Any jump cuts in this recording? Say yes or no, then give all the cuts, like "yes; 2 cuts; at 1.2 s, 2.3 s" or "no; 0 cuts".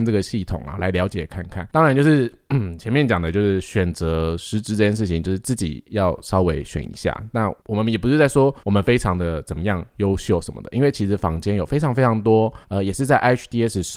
yes; 4 cuts; at 1.7 s, 7.6 s, 8.6 s, 12.6 s